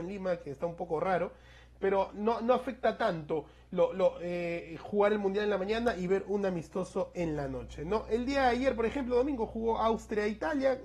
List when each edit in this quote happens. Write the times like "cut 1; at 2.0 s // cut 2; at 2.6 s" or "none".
none